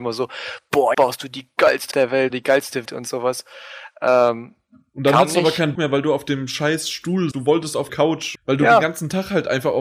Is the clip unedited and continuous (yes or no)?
no